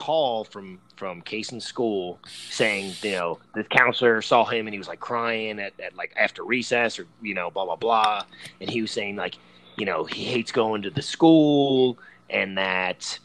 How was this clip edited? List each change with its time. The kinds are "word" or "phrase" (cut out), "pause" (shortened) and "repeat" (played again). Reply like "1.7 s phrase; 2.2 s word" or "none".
none